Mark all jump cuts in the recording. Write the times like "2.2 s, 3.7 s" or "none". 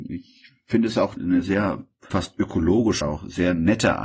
1.2 s, 2.1 s, 3.0 s